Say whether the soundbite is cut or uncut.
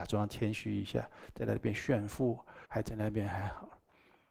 cut